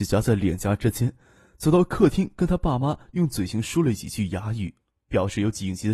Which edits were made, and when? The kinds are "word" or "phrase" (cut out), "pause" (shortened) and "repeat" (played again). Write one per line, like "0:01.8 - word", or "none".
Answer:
none